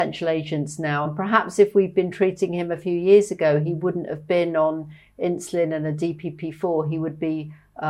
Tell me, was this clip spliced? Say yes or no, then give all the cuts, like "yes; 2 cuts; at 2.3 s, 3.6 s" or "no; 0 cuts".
no; 0 cuts